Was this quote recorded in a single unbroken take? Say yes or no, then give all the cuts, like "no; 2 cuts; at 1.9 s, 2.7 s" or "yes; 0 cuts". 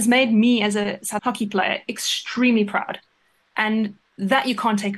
no; 2 cuts; at 1.2 s, 4.1 s